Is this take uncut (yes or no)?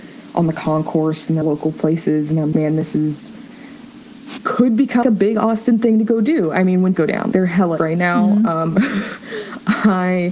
no